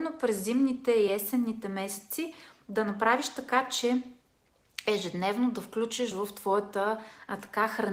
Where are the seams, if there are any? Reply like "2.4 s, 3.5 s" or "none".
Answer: none